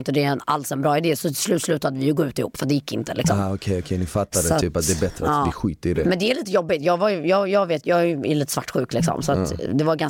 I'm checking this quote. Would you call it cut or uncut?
uncut